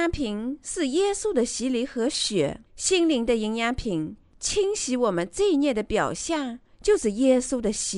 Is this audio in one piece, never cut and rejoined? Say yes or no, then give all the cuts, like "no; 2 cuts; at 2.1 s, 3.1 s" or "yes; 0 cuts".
no; 1 cut; at 2.7 s